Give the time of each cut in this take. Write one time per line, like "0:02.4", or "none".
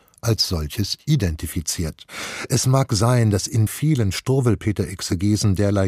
0:03.7